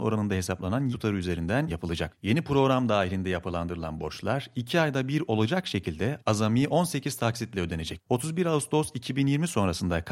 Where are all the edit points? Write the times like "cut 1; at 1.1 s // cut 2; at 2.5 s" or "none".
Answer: cut 1; at 0.9 s // cut 2; at 1.7 s